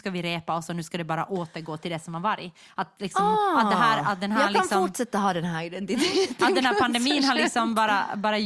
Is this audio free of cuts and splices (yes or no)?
yes